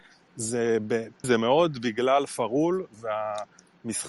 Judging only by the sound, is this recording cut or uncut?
cut